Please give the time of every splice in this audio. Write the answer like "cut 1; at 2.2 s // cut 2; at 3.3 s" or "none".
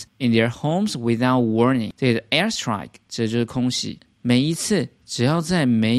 none